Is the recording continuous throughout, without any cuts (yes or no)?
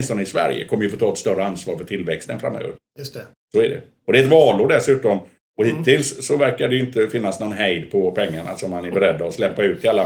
yes